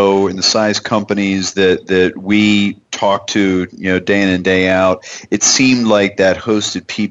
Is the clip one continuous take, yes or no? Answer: yes